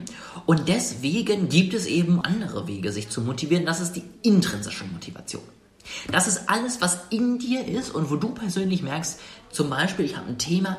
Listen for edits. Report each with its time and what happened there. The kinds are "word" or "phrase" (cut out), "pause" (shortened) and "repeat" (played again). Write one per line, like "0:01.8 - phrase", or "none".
0:02.2 - phrase